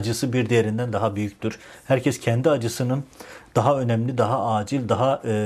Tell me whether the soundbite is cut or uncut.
uncut